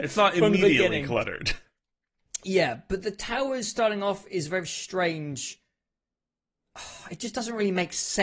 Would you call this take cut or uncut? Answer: uncut